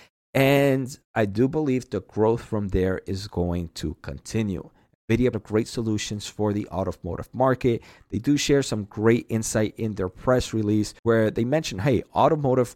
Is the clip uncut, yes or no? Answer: no